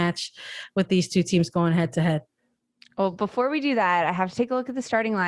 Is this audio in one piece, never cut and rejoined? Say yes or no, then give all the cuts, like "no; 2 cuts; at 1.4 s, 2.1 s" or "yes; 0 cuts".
yes; 0 cuts